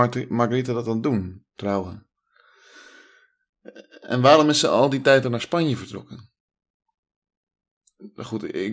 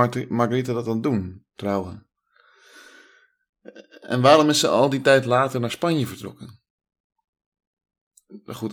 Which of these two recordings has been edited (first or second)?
first